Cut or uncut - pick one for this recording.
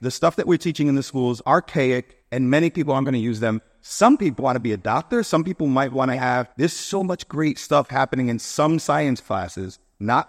cut